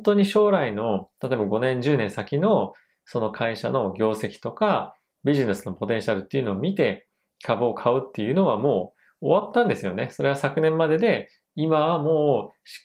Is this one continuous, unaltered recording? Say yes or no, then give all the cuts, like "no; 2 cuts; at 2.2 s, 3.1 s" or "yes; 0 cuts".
yes; 0 cuts